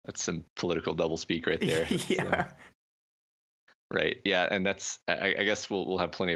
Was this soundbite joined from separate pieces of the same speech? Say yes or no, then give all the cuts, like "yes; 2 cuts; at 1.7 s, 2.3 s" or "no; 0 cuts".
no; 0 cuts